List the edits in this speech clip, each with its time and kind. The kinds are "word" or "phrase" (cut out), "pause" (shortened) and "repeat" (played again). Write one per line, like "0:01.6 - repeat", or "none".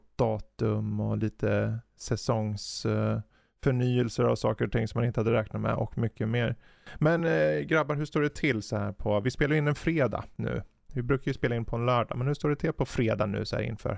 none